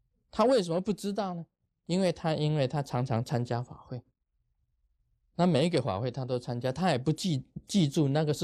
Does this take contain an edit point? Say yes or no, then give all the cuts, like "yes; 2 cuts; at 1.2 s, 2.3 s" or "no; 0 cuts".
no; 0 cuts